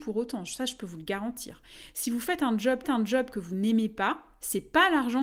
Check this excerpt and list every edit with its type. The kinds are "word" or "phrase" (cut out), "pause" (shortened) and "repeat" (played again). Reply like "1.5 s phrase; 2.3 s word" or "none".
2.8 s repeat